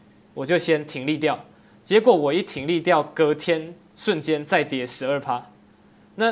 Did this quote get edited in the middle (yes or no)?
no